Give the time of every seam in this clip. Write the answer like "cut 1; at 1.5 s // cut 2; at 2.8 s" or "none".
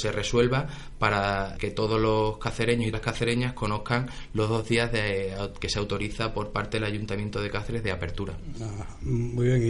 cut 1; at 1.6 s // cut 2; at 2.9 s

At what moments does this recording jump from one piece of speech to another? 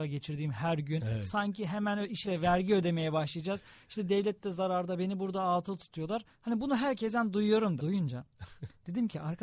cut 1; at 2.2 s // cut 2; at 6.3 s // cut 3; at 7.8 s

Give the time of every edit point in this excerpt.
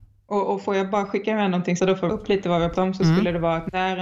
cut 1; at 1.8 s // cut 2; at 2.1 s // cut 3; at 2.7 s

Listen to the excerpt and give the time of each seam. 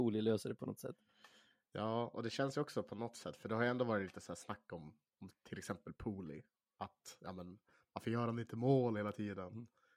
none

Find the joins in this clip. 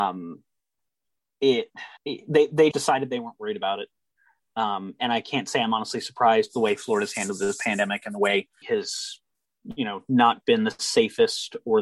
cut 1; at 2.0 s // cut 2; at 2.7 s // cut 3; at 8.6 s

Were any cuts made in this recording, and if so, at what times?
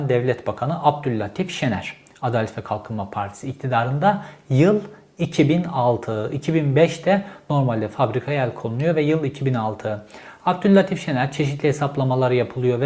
none

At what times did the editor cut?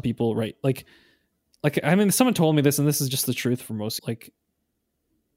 cut 1; at 4.0 s

